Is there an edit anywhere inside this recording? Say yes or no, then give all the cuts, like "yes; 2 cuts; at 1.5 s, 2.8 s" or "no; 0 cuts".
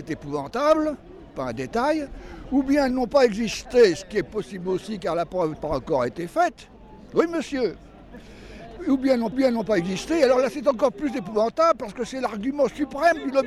yes; 3 cuts; at 1.3 s, 5.5 s, 9.3 s